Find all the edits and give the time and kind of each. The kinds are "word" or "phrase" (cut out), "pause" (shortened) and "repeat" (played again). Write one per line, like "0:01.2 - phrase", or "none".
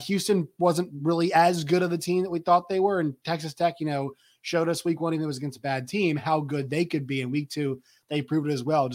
none